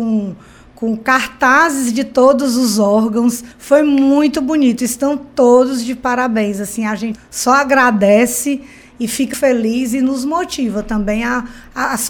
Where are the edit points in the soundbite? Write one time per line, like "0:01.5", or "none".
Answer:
0:03.5
0:07.2
0:09.3